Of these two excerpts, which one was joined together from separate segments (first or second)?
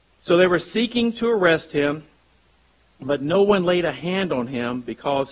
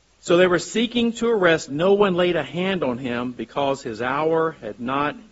second